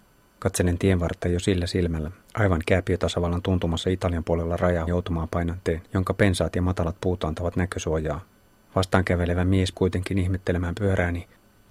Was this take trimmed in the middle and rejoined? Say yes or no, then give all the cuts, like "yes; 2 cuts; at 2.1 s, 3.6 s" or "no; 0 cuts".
yes; 5 cuts; at 2.2 s, 4.9 s, 5.9 s, 8.3 s, 9.7 s